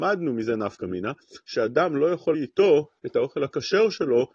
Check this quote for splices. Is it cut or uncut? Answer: cut